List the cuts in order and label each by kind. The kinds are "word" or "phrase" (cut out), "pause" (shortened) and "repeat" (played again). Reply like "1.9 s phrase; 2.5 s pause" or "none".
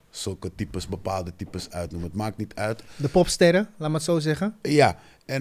none